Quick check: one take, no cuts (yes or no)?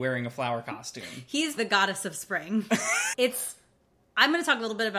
no